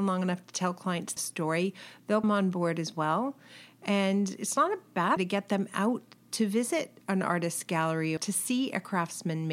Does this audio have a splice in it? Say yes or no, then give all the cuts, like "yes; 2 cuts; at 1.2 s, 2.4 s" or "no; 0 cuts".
yes; 5 cuts; at 1.2 s, 2.2 s, 5.2 s, 7.0 s, 8.2 s